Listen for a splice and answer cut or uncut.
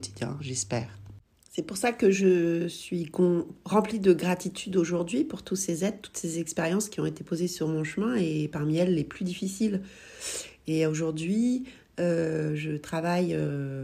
uncut